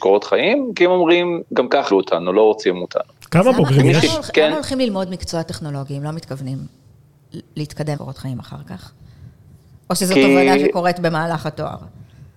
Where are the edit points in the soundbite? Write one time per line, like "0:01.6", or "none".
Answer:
0:01.9
0:08.0

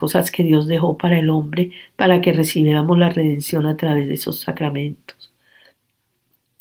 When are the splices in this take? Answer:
none

